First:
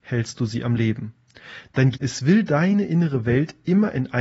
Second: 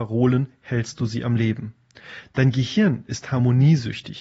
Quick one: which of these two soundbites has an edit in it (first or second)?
first